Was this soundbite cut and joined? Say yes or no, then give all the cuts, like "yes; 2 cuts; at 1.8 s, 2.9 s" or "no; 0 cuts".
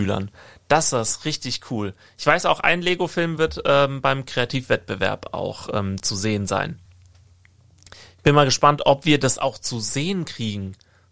no; 0 cuts